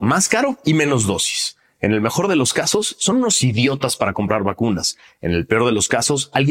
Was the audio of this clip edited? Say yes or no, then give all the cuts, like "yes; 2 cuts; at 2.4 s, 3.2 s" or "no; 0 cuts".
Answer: no; 0 cuts